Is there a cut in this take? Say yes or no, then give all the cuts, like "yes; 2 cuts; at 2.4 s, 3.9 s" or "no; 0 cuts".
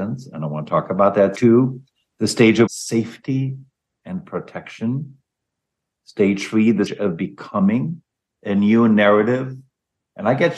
yes; 3 cuts; at 1.3 s, 2.7 s, 6.9 s